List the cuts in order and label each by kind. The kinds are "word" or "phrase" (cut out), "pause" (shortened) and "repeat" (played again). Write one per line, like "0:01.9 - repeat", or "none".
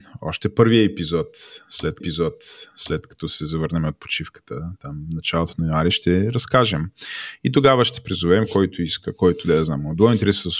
0:02.0 - repeat